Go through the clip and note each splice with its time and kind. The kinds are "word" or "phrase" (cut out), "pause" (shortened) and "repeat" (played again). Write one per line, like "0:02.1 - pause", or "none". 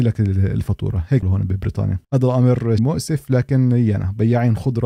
0:01.2 - word
0:02.0 - pause
0:02.8 - word